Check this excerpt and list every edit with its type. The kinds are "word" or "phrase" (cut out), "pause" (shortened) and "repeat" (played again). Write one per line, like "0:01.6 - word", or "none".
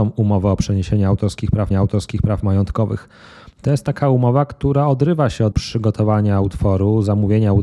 0:01.7 - repeat
0:05.5 - word